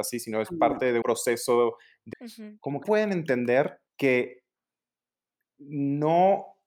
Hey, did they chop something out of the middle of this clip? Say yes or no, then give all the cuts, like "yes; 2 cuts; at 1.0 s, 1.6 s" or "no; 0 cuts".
yes; 4 cuts; at 1.0 s, 2.1 s, 2.8 s, 3.9 s